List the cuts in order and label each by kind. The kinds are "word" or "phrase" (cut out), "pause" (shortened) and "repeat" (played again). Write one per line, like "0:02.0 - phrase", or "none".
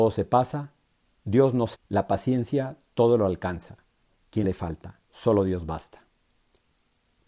0:01.7 - word
0:04.4 - phrase
0:05.0 - pause